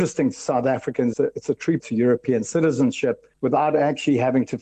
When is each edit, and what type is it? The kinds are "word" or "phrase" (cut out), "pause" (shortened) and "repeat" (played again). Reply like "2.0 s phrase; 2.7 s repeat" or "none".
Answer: 1.1 s phrase; 1.8 s word; 3.3 s pause